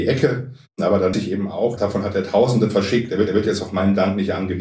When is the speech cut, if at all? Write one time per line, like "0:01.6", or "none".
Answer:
0:01.1
0:01.8
0:03.3